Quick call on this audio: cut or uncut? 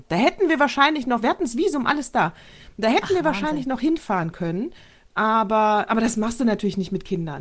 cut